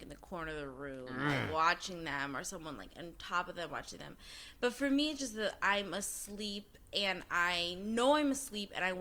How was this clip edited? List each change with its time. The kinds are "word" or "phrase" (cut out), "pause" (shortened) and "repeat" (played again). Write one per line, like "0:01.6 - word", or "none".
none